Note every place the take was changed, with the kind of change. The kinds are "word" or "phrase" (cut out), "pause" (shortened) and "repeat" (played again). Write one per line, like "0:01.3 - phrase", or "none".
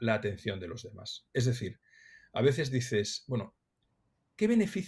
none